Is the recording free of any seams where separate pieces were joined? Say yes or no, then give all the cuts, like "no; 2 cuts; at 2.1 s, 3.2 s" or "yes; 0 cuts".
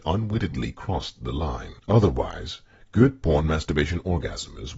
no; 1 cut; at 1.8 s